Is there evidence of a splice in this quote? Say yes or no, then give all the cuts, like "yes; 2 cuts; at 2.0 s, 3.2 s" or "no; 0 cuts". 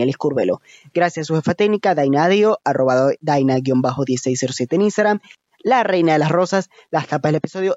no; 0 cuts